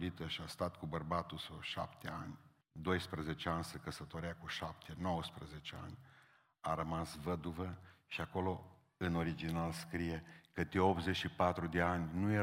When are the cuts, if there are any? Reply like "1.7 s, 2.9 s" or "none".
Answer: 2.6 s

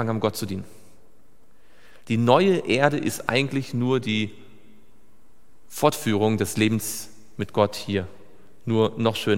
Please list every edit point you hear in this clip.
none

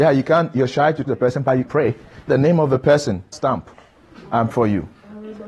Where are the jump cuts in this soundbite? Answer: 1.0 s, 1.6 s, 2.3 s, 3.3 s, 4.5 s

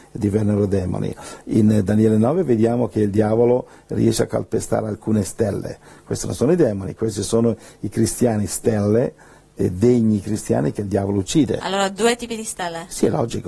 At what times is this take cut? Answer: none

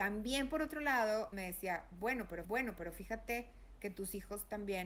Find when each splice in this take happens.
1.3 s, 2.4 s

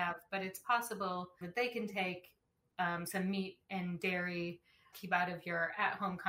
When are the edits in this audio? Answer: 1.4 s, 4.9 s

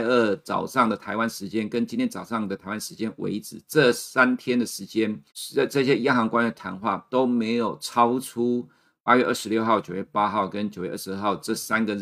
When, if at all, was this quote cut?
5.3 s

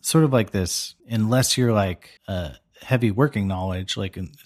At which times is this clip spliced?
1.0 s, 2.2 s

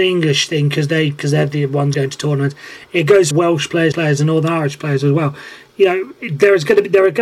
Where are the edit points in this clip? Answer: 1.9 s, 3.3 s, 3.9 s

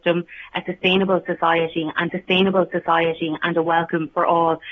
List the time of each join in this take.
2.1 s

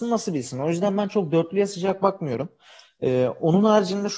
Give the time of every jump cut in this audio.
none

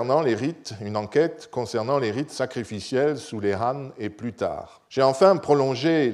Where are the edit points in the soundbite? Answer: 4.9 s

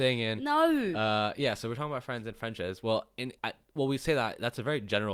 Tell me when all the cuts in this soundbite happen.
3.4 s

